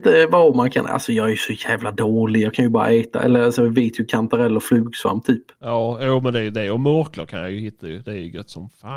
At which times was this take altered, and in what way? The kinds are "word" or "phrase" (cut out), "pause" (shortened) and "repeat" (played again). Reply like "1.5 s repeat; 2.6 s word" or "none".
none